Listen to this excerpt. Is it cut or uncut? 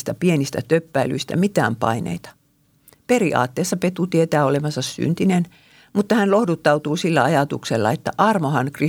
uncut